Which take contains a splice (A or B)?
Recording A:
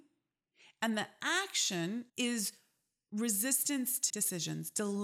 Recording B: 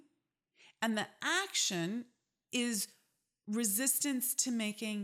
A